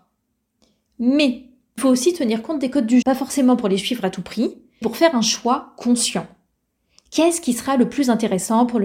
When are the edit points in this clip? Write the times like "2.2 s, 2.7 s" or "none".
1.8 s, 3.0 s, 4.8 s